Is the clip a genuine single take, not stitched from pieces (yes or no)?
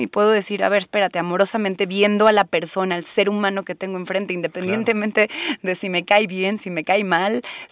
yes